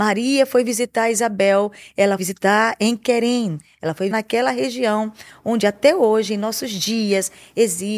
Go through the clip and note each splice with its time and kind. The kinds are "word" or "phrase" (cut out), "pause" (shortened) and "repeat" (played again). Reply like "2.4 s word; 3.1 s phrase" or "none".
2.2 s word; 4.1 s word